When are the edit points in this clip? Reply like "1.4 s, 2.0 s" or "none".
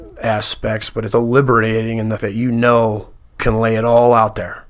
1.1 s, 2.2 s, 3.4 s